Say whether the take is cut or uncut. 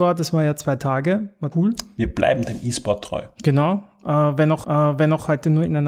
cut